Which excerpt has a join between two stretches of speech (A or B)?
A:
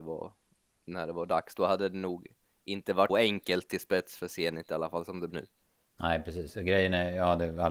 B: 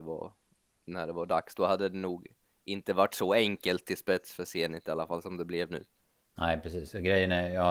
A